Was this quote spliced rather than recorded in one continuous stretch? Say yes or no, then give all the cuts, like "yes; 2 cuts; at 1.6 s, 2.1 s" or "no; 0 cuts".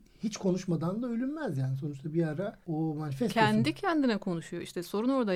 yes; 1 cut; at 2.6 s